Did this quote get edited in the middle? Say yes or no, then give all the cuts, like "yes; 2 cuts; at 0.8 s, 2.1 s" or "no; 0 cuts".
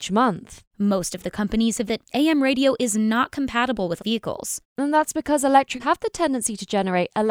yes; 4 cuts; at 1.3 s, 1.9 s, 4.0 s, 5.8 s